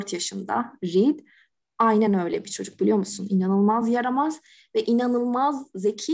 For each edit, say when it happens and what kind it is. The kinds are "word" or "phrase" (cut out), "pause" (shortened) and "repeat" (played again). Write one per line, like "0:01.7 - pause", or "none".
none